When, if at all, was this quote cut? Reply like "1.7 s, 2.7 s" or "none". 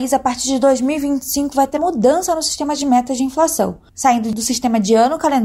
1.8 s